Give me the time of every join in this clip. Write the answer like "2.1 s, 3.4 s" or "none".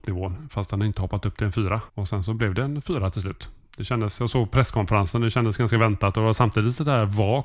1.9 s